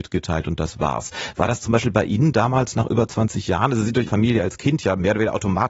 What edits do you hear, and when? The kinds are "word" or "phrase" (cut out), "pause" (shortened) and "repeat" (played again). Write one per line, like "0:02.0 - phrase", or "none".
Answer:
0:04.1 - word